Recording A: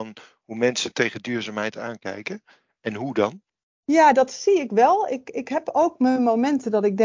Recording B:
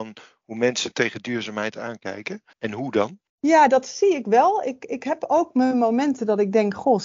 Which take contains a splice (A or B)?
B